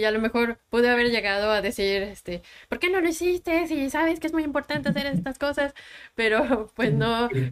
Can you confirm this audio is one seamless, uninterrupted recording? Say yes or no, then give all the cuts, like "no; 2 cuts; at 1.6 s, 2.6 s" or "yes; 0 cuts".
yes; 0 cuts